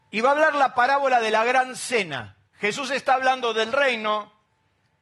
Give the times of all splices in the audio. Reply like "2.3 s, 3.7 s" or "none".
2.5 s